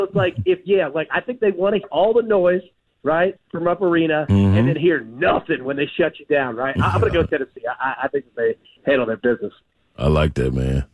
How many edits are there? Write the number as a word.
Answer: one